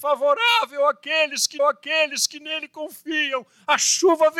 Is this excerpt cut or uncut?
cut